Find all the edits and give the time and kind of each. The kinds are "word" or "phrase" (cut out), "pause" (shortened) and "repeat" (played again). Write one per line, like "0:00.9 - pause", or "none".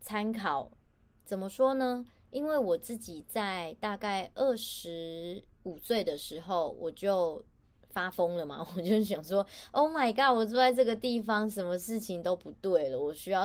none